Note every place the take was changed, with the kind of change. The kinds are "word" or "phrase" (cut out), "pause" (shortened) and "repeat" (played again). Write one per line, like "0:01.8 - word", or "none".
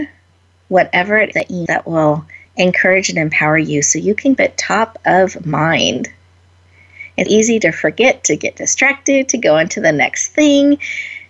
0:01.3 - word
0:01.7 - phrase
0:02.4 - pause
0:04.4 - word
0:07.3 - word